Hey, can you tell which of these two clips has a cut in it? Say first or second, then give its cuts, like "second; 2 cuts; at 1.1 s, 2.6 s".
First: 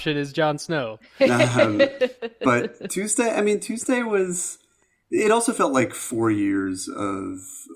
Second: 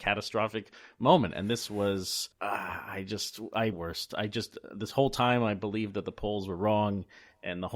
second; 2 cuts; at 2.3 s, 3.7 s